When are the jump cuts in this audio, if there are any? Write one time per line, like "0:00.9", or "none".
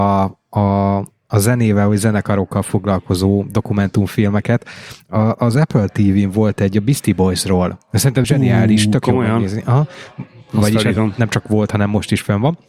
0:08.2